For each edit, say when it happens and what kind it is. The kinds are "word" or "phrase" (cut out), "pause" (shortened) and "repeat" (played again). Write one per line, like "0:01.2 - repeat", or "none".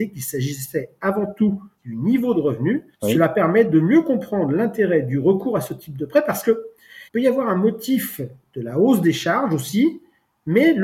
0:01.7 - pause
0:02.9 - pause
0:07.1 - pause